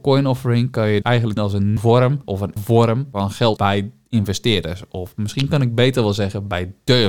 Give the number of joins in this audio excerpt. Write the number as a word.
six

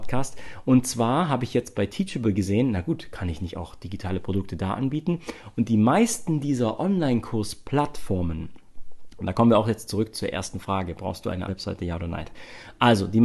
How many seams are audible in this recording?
one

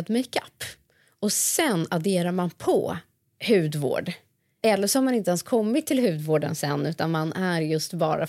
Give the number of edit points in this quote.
zero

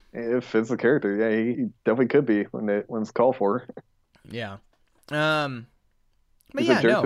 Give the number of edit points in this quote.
one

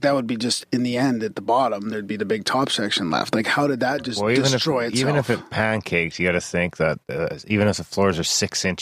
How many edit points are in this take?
one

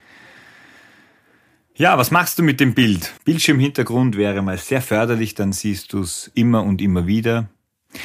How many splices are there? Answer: one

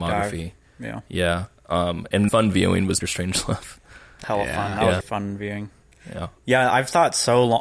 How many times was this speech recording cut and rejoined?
five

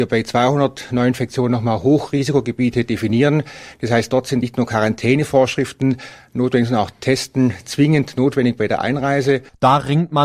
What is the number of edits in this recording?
one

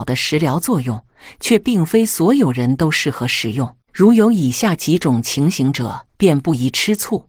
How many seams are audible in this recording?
two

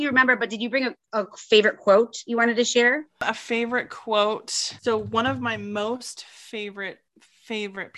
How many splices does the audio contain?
one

